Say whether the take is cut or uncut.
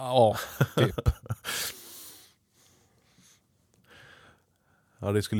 uncut